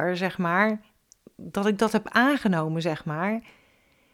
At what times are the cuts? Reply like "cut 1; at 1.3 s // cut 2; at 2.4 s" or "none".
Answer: none